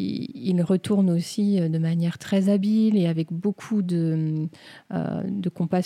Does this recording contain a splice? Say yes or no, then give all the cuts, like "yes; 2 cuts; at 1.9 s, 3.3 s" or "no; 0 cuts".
no; 0 cuts